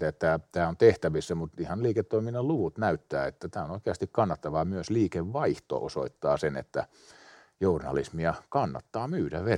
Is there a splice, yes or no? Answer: yes